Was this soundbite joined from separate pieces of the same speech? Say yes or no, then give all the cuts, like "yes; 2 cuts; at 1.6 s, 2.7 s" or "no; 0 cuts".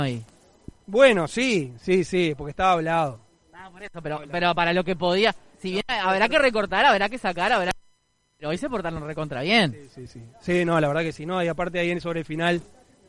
no; 0 cuts